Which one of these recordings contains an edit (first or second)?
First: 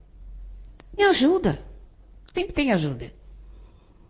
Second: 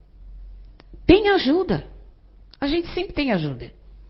first